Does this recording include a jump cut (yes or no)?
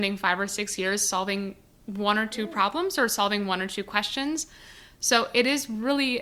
no